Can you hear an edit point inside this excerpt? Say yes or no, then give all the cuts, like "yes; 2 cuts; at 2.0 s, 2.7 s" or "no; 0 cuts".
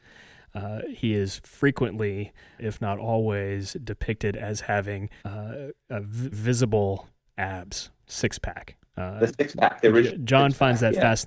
yes; 3 cuts; at 2.6 s, 5.2 s, 6.3 s